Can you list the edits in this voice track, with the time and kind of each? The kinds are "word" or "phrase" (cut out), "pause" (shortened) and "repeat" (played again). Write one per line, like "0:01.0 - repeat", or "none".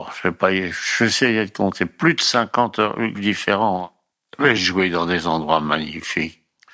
0:03.1 - word
0:04.6 - word